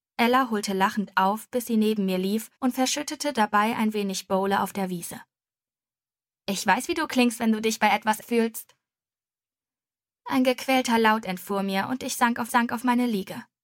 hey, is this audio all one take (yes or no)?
no